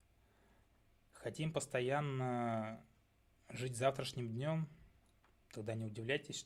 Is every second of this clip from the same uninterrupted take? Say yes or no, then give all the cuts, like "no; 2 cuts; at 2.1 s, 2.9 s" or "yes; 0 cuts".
yes; 0 cuts